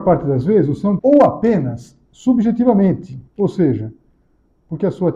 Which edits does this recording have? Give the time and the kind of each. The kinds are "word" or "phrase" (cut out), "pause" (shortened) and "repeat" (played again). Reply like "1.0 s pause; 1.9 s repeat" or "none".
1.0 s word; 3.3 s pause